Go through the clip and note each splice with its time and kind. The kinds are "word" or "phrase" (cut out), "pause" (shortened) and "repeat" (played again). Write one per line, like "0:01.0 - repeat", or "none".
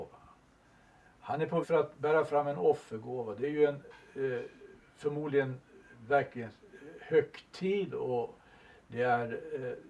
0:01.6 - word